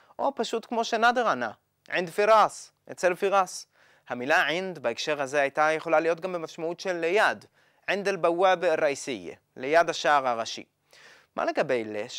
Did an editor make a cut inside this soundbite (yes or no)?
no